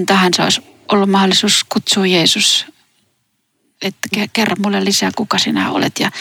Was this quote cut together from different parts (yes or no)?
no